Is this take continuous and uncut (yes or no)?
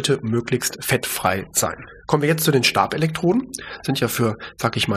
yes